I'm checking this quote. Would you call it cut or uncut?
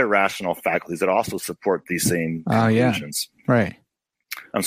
uncut